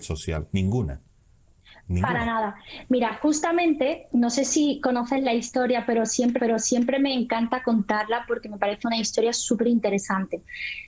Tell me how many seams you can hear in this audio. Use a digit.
2